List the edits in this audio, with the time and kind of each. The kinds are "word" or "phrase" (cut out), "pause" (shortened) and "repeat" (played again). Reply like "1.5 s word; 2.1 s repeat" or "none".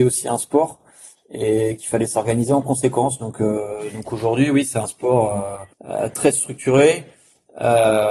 5.7 s pause